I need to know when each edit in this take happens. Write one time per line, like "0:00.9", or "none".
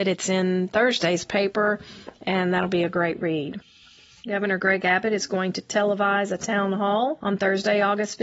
none